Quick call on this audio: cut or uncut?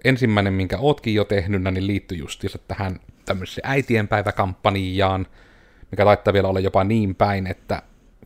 uncut